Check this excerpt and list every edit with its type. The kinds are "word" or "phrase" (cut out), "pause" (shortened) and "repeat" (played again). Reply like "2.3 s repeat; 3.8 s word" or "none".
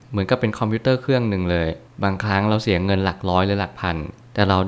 none